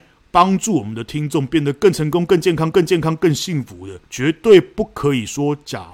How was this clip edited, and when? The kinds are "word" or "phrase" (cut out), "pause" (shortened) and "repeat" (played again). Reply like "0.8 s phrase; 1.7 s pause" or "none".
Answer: 2.7 s repeat; 4.1 s pause